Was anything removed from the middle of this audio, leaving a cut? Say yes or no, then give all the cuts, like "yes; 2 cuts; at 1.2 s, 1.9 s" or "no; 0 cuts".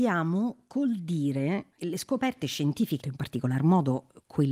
yes; 2 cuts; at 1.8 s, 3.0 s